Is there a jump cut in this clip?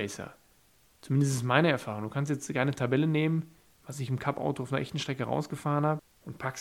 no; 0 cuts

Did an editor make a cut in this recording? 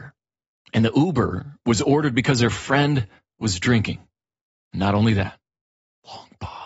no; 0 cuts

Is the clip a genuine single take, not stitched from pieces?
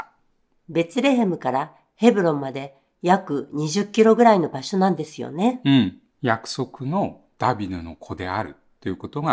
no; 1 cut; at 6.1 s

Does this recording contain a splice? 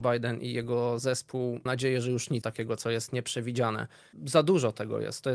yes; 2 cuts; at 1.7 s, 2.4 s

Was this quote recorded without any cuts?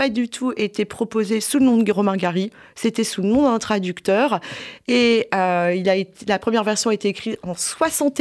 yes; 0 cuts

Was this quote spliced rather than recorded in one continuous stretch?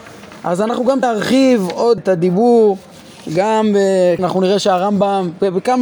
yes; 3 cuts; at 1.0 s, 2.0 s, 4.2 s

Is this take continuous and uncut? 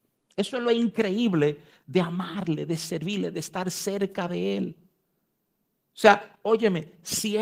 yes; 0 cuts

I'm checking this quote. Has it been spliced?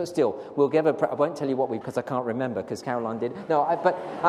yes; 1 cut; at 1.8 s

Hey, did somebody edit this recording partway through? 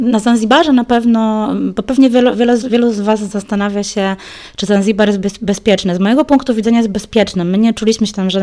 yes; 1 cut; at 2.6 s

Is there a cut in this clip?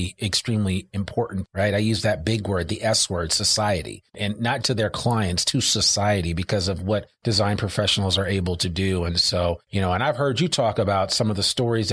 yes; 5 cuts; at 1.4 s, 4.1 s, 4.6 s, 7.2 s, 9.6 s

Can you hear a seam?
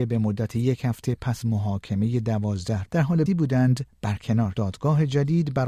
yes; 4 cuts; at 1.4 s, 2.8 s, 3.3 s, 4.5 s

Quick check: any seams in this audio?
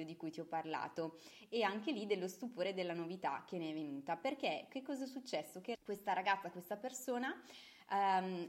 yes; 1 cut; at 5.7 s

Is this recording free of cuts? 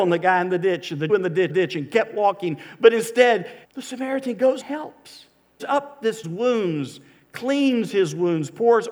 no; 6 cuts; at 1.1 s, 1.5 s, 3.6 s, 4.6 s, 5.6 s, 6.2 s

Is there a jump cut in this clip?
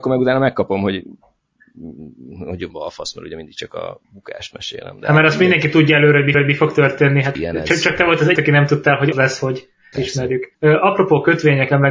yes; 8 cuts; at 2.7 s, 4.0 s, 6.3 s, 7.4 s, 8.4 s, 9.1 s, 9.9 s, 10.5 s

